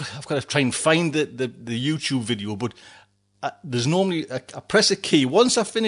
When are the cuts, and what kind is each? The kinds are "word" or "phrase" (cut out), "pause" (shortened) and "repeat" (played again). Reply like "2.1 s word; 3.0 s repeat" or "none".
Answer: none

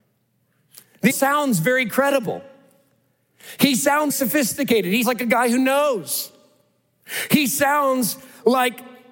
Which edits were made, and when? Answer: 1.1 s word; 4.1 s word; 5.0 s word

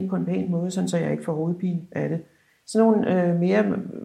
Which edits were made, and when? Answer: none

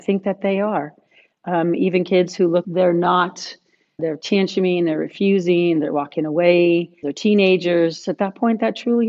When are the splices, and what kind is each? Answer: 2.6 s word; 4.0 s word; 7.0 s word

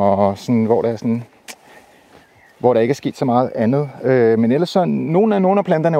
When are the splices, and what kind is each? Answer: none

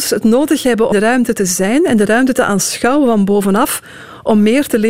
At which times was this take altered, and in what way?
0.9 s word

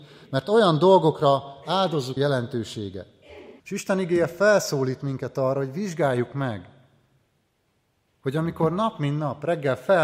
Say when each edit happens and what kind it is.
2.2 s phrase; 3.6 s pause

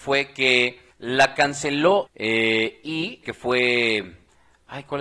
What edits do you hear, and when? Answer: 0.9 s pause; 2.1 s phrase; 3.2 s word

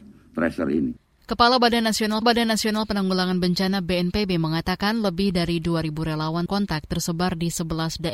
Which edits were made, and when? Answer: 2.2 s repeat; 6.5 s word

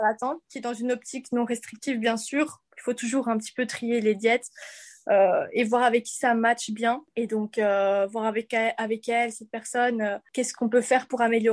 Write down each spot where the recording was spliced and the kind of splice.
2.7 s pause

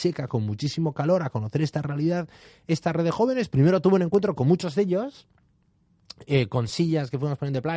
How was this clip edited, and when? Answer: none

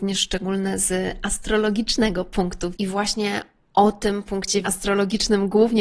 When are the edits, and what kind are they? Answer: 2.7 s word; 4.6 s word

